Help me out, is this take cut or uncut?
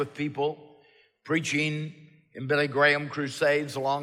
uncut